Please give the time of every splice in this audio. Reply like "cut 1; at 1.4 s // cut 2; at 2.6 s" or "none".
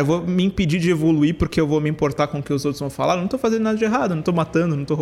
none

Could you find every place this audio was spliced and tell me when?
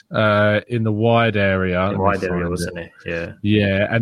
none

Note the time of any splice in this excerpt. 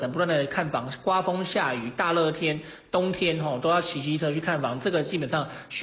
none

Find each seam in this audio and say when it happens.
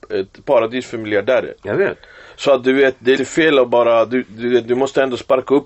cut 1; at 3.2 s

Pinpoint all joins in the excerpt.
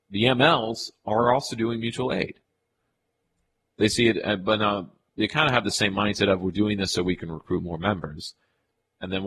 none

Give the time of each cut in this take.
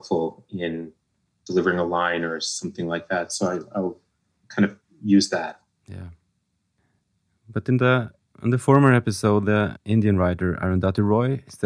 none

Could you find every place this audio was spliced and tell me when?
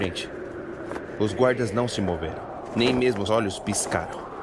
cut 1; at 3.3 s

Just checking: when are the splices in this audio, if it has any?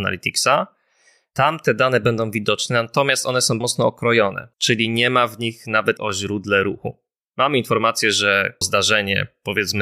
cut 1; at 3.6 s // cut 2; at 4.5 s // cut 3; at 6.0 s // cut 4; at 8.6 s

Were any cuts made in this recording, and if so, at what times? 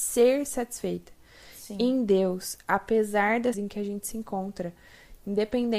cut 1; at 3.5 s

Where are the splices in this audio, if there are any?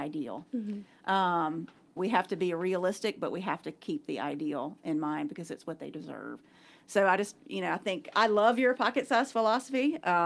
cut 1; at 2.0 s // cut 2; at 8.1 s

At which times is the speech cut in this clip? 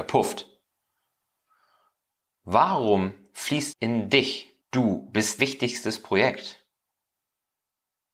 cut 1; at 3.7 s // cut 2; at 4.6 s // cut 3; at 5.4 s

